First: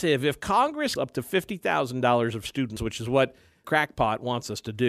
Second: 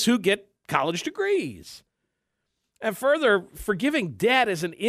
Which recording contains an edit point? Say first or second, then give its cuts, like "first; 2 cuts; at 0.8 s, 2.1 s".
first; 3 cuts; at 1.0 s, 2.8 s, 3.6 s